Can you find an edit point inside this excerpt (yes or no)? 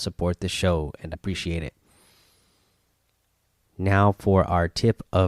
yes